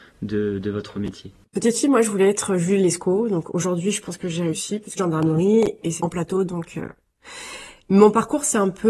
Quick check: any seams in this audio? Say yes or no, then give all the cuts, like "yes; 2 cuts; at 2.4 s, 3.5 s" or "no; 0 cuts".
yes; 3 cuts; at 1.4 s, 5.0 s, 6.0 s